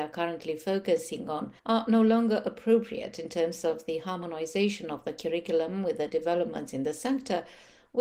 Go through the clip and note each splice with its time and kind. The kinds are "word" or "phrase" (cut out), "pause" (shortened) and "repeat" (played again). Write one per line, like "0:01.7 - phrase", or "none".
0:01.6 - pause